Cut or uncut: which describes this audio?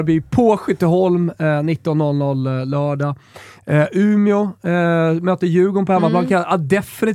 uncut